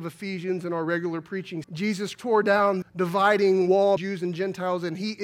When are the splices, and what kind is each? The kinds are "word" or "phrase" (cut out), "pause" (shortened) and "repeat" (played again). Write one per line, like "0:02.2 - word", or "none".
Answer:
0:01.6 - word
0:02.1 - word
0:02.8 - word
0:04.0 - word